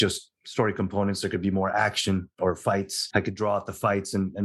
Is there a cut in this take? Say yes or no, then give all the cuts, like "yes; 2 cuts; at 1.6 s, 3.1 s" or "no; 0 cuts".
no; 0 cuts